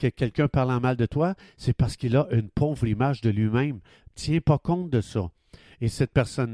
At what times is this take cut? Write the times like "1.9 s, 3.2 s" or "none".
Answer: none

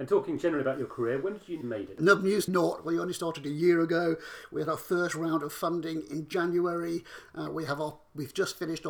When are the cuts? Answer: 1.6 s, 2.5 s

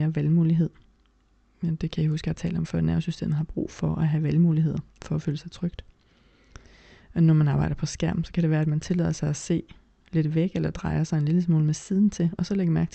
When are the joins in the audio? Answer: none

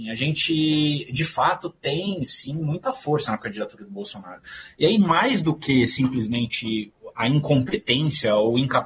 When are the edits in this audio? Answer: none

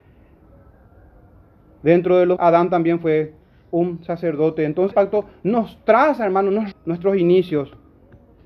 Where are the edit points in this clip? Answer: 2.4 s, 4.9 s, 6.7 s

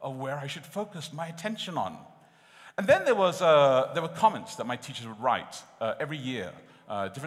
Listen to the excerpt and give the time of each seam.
none

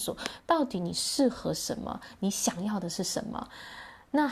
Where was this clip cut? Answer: none

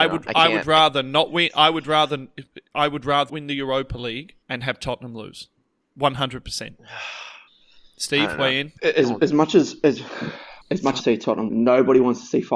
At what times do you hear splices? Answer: 3.3 s, 4.4 s, 7.5 s, 8.8 s, 10.6 s, 11.0 s, 11.5 s

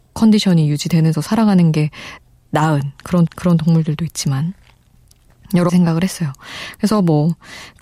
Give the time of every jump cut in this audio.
1.1 s, 3.3 s, 5.7 s

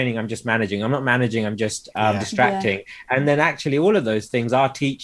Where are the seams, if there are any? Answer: none

